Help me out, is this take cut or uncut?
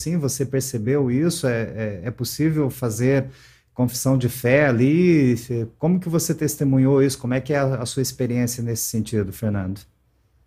uncut